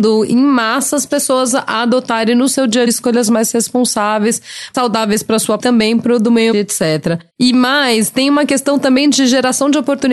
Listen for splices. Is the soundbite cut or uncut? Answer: cut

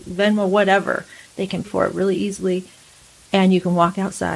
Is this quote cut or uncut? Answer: cut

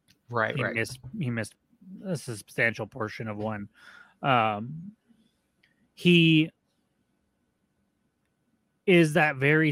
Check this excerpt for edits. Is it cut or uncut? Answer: uncut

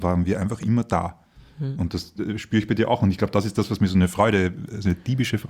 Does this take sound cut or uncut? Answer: uncut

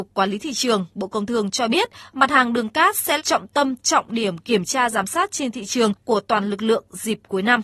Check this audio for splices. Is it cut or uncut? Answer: cut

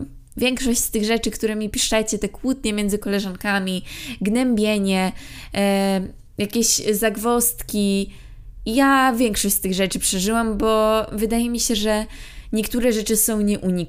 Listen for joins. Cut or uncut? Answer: uncut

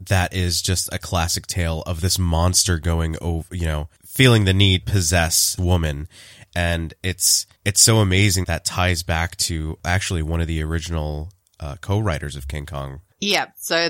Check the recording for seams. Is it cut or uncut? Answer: cut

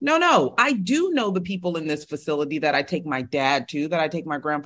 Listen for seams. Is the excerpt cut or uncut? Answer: uncut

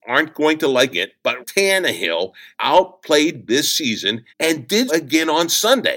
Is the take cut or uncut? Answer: cut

